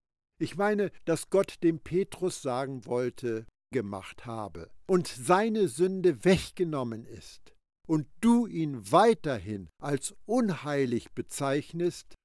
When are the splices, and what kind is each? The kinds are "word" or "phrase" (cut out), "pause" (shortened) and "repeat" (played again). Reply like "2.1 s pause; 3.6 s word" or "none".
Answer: 3.7 s phrase